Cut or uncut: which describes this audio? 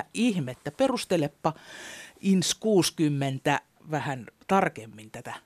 uncut